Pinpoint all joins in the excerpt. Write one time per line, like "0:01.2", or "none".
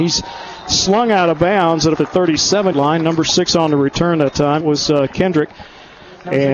0:02.0
0:02.7
0:04.6